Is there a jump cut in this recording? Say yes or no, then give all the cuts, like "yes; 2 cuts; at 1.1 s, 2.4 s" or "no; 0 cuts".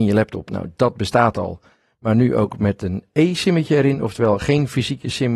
no; 0 cuts